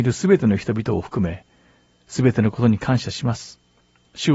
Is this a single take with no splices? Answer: yes; 0 cuts

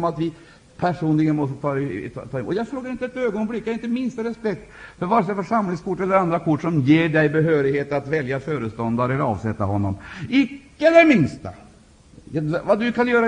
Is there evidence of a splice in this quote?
no; 0 cuts

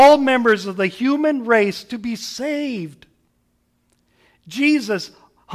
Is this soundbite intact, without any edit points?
yes; 0 cuts

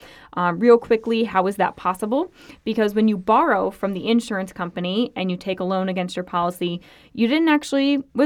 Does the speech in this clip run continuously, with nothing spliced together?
yes; 0 cuts

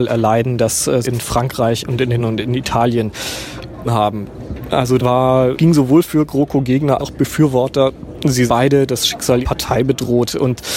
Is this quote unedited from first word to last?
no; 8 cuts; at 1.0 s, 2.2 s, 3.8 s, 5.0 s, 5.5 s, 7.0 s, 8.5 s, 9.4 s

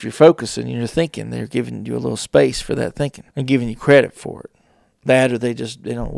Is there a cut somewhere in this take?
yes; 1 cut; at 3.3 s

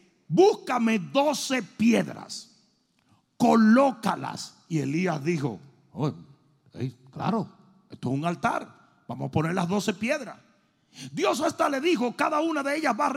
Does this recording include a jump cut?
no; 0 cuts

